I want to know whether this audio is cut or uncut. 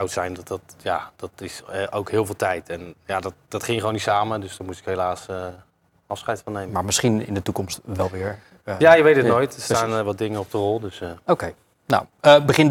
uncut